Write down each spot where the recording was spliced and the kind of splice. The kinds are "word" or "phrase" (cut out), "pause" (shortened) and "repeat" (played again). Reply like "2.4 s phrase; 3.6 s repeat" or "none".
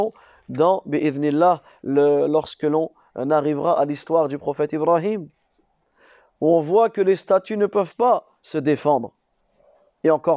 8.4 s pause